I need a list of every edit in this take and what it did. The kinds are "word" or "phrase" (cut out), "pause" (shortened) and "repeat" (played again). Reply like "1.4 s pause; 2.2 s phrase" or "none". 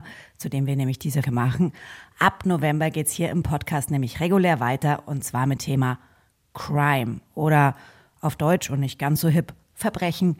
1.2 s word; 5.6 s word